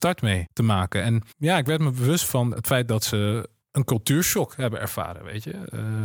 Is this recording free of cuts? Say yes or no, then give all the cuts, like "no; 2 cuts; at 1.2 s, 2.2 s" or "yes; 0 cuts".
yes; 0 cuts